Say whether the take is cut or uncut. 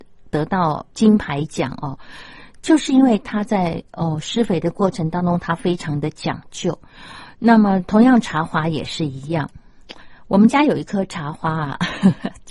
cut